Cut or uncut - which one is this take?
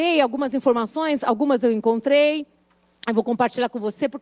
uncut